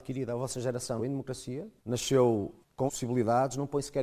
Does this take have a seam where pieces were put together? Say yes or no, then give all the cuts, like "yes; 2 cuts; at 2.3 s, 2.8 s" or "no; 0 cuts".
yes; 3 cuts; at 1.0 s, 1.8 s, 2.9 s